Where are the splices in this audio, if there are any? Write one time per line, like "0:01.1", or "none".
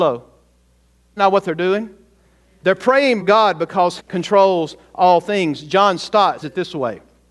0:01.2
0:03.2
0:04.0
0:06.4